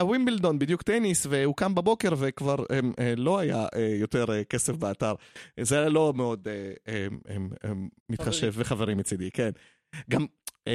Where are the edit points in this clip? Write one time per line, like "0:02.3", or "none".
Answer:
0:08.0

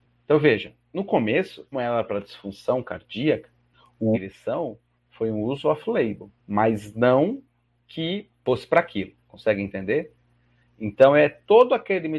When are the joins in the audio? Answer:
0:01.7
0:04.1
0:06.4

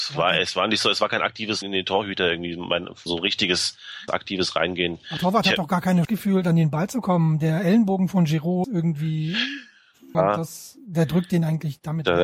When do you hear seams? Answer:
0:01.6
0:03.1
0:04.1
0:05.2
0:06.0
0:08.6
0:10.1

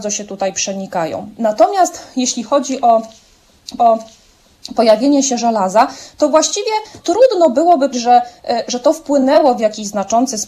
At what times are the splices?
0:03.8
0:07.0
0:07.9

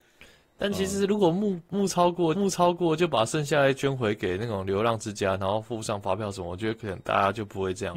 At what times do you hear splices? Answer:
0:02.3

